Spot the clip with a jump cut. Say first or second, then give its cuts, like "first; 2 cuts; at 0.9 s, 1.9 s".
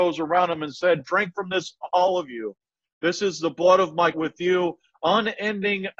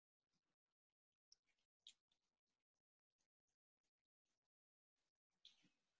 first; 1 cut; at 4.1 s